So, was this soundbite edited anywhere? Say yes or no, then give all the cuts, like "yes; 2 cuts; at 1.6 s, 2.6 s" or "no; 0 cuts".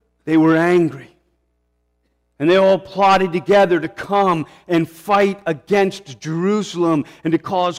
no; 0 cuts